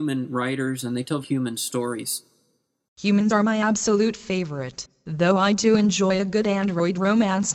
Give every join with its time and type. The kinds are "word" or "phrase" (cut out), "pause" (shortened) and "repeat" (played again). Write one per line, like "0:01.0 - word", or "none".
0:01.2 - word
0:03.3 - word